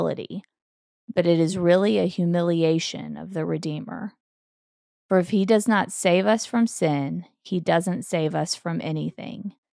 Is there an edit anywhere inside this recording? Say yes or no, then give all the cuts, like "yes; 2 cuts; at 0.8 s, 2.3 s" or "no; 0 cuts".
no; 0 cuts